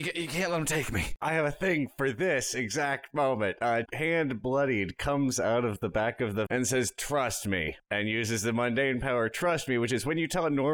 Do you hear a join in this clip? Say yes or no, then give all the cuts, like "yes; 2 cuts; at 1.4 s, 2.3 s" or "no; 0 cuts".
yes; 2 cuts; at 3.9 s, 6.5 s